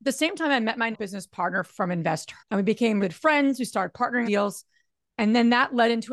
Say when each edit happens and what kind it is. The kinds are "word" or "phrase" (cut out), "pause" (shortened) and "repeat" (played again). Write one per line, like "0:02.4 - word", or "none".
0:00.9 - word
0:01.7 - word
0:02.4 - word
0:03.0 - word
0:04.2 - word